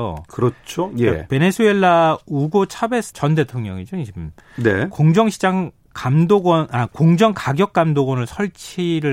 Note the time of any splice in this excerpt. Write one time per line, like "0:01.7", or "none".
0:03.1